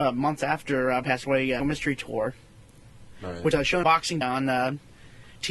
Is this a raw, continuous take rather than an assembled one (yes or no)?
no